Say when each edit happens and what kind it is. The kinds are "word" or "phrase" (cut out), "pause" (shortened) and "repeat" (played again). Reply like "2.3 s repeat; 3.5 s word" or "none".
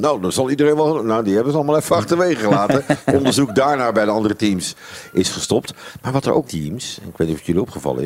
6.4 s phrase